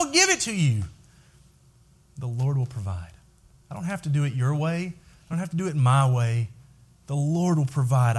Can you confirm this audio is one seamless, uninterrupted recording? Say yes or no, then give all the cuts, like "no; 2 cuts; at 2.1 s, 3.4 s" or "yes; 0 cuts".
yes; 0 cuts